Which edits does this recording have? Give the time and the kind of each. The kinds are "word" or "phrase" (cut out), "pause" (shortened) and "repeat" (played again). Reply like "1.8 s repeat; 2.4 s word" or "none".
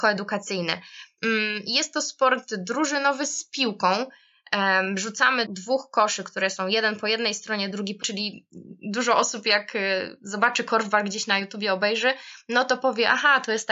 5.4 s word; 8.0 s word